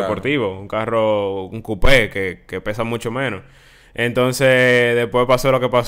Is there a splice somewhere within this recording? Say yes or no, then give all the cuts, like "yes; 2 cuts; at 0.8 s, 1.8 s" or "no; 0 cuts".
no; 0 cuts